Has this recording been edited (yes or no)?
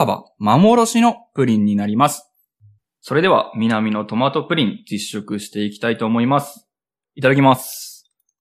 no